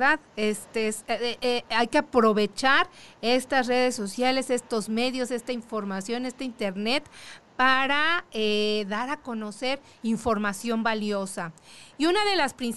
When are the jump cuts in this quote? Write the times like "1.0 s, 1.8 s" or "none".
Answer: none